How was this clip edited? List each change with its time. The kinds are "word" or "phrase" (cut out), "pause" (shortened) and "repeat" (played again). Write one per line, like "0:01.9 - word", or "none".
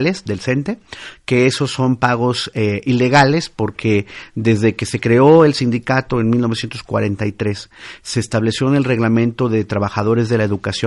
none